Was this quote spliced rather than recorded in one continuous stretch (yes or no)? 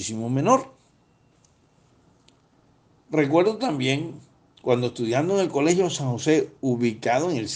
no